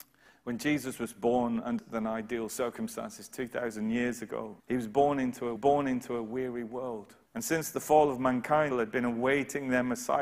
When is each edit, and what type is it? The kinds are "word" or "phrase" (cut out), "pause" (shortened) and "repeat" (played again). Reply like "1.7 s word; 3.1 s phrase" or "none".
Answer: 1.8 s word; 4.6 s pause; 5.6 s repeat; 7.3 s pause; 8.7 s phrase

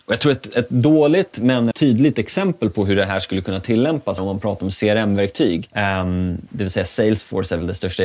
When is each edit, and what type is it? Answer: 1.7 s word; 4.2 s word

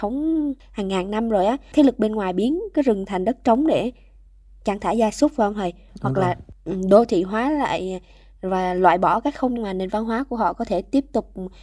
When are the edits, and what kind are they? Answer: 1.7 s word; 9.6 s word

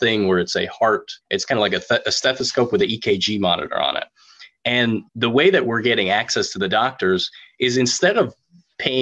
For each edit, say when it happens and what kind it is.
1.2 s pause; 5.1 s pause

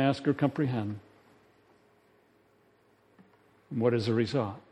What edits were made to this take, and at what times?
none

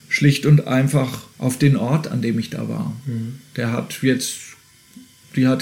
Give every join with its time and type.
1.3 s pause

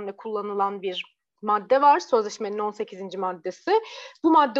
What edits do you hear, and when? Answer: none

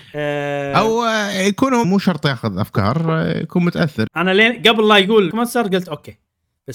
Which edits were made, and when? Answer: 1.8 s phrase; 4.1 s word; 5.3 s word

